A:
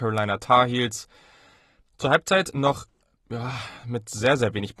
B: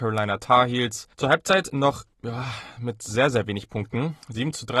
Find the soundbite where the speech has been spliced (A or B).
B